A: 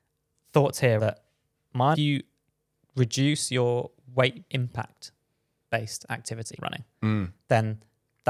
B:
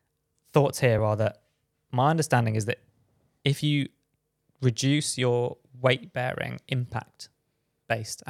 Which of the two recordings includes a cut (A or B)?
A